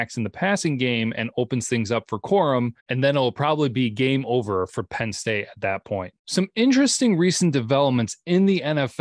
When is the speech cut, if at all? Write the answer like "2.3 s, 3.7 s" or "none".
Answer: 2.8 s, 6.2 s